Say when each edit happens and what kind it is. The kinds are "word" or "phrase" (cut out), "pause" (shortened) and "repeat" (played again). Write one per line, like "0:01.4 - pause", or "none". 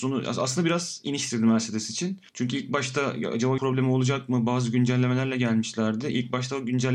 0:01.3 - word
0:02.3 - pause
0:03.6 - word